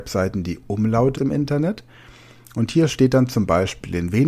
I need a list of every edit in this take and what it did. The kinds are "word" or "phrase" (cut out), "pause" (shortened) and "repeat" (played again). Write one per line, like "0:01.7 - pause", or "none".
0:01.1 - word